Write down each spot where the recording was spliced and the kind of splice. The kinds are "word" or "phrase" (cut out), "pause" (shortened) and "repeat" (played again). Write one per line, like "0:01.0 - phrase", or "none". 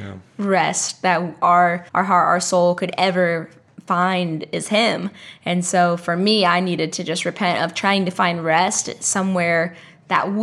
0:01.9 - pause